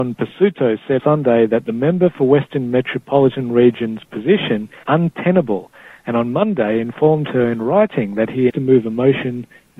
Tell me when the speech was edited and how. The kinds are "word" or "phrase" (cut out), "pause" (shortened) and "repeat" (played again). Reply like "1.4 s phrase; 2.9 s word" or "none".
1.0 s word; 4.8 s word; 8.5 s word